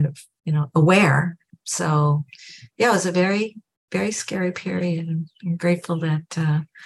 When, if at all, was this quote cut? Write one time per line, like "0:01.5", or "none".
none